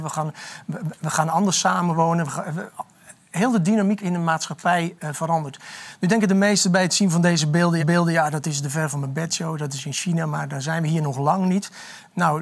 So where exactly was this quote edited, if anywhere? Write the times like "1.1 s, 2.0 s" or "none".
4.0 s, 7.8 s